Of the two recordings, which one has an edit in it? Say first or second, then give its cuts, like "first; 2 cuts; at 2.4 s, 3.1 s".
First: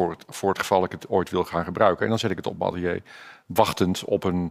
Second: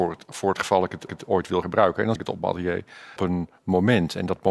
second; 4 cuts; at 1.1 s, 1.6 s, 2.2 s, 3.2 s